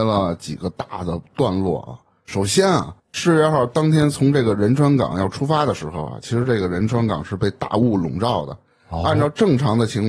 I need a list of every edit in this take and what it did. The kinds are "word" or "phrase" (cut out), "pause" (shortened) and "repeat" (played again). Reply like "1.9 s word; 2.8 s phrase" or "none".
none